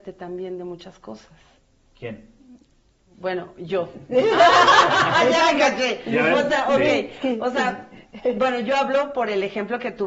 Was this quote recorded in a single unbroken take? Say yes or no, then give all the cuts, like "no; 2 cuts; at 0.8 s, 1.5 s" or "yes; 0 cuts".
yes; 0 cuts